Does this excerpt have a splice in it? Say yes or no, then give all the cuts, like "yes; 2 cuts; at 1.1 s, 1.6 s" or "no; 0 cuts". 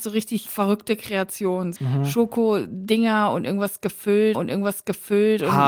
yes; 2 cuts; at 1.8 s, 4.3 s